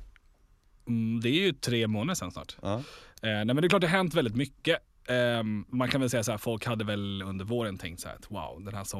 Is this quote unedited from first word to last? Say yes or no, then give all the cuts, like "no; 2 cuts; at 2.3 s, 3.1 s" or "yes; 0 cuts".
yes; 0 cuts